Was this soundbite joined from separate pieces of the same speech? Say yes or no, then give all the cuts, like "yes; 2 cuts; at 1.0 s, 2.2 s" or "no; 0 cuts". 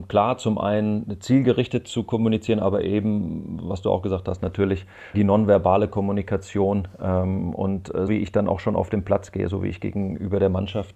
yes; 2 cuts; at 5.1 s, 8.1 s